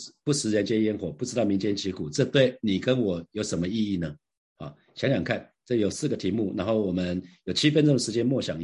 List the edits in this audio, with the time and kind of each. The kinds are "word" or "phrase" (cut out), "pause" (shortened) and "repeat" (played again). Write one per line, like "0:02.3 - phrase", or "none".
none